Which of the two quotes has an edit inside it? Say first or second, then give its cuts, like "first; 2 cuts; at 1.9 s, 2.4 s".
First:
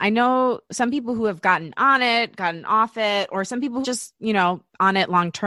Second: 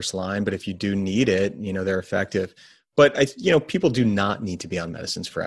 first; 1 cut; at 3.8 s